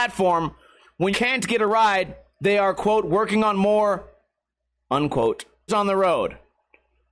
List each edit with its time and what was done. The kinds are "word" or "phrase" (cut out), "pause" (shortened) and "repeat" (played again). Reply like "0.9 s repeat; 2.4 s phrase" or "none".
1.1 s word; 5.7 s word